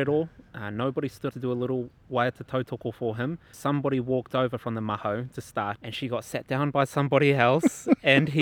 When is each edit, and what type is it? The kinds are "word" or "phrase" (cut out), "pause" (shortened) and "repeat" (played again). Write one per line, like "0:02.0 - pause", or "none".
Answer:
0:01.3 - word
0:03.5 - word
0:05.8 - word